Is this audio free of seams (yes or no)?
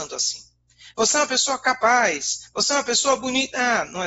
yes